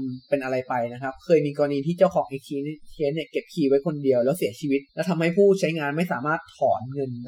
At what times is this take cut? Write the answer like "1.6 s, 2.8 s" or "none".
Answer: 4.9 s